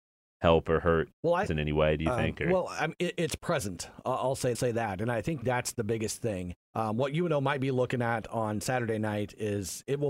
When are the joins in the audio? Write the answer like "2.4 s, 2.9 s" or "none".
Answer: 1.1 s, 1.5 s, 4.5 s, 5.4 s, 6.6 s